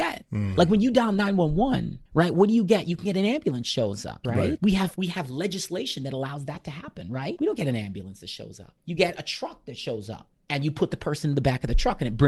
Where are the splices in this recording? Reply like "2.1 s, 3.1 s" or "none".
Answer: none